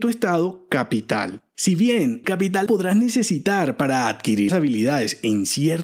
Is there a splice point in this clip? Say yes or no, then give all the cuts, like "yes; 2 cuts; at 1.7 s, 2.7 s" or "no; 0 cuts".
yes; 3 cuts; at 2.2 s, 2.7 s, 4.5 s